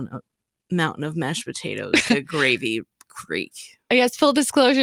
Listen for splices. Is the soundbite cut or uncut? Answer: cut